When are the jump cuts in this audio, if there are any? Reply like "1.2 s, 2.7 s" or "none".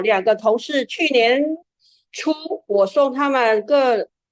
none

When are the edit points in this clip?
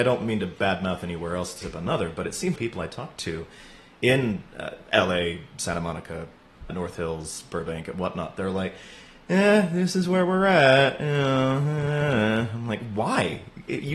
1.6 s, 2.6 s, 4.5 s, 6.7 s

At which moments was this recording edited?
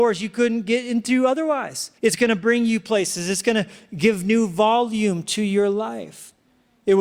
2.0 s

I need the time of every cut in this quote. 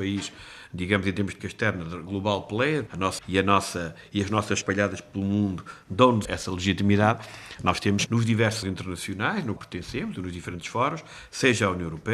1.4 s, 2.1 s, 2.9 s, 3.2 s, 4.6 s, 6.2 s, 8.1 s, 8.6 s, 9.6 s

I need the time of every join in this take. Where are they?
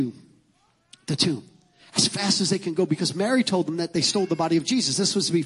none

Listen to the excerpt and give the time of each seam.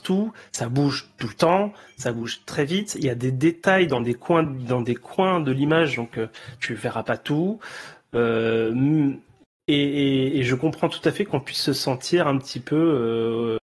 none

